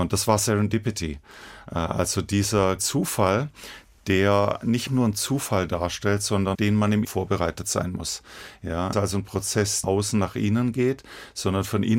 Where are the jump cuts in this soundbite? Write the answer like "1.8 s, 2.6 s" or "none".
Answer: 2.8 s, 4.9 s, 6.5 s, 7.0 s, 8.9 s, 9.8 s